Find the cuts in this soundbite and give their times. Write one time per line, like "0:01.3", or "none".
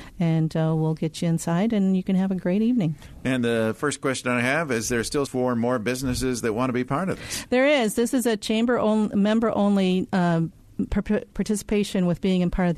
0:05.3

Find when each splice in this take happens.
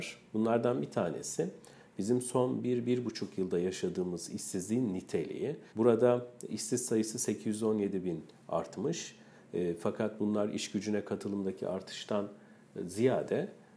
0:05.7

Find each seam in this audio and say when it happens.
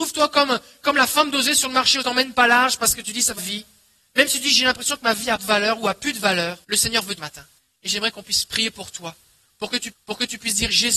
0:02.0
0:03.4
0:05.4
0:06.6
0:07.2
0:07.6
0:09.9

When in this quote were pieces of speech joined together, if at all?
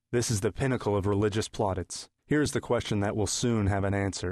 0:02.2

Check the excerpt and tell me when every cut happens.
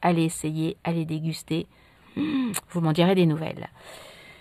none

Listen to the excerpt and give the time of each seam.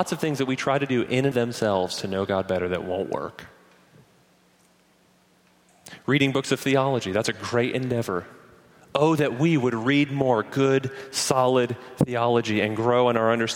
0:01.3

